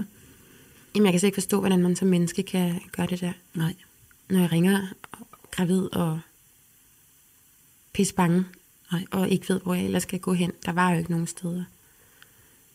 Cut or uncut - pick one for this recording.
uncut